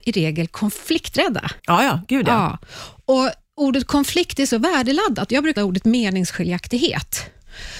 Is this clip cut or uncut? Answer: cut